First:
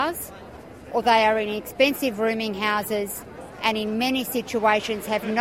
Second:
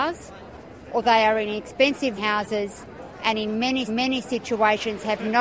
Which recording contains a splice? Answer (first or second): second